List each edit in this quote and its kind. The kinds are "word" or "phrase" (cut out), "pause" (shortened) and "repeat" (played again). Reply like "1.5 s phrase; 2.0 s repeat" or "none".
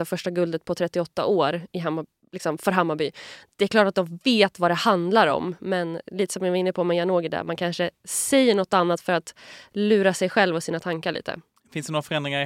none